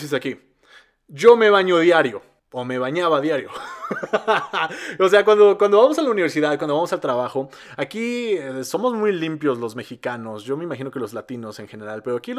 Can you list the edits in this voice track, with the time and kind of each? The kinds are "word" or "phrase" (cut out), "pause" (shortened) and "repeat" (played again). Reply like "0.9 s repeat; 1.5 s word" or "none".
2.4 s pause